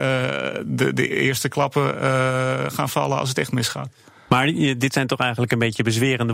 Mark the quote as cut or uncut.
uncut